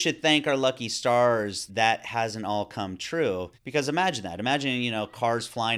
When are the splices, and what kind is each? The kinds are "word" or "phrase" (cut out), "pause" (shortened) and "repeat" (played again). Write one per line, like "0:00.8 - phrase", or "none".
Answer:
0:01.7 - word
0:03.5 - pause

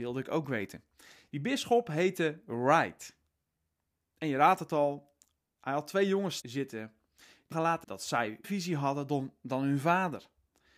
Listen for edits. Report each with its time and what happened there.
0:06.4 - word
0:07.5 - word
0:07.8 - word
0:08.4 - word

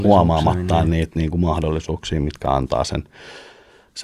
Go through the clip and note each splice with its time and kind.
none

